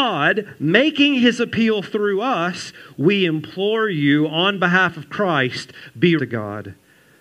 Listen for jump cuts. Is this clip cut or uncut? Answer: cut